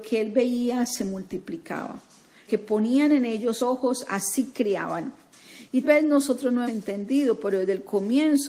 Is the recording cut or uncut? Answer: cut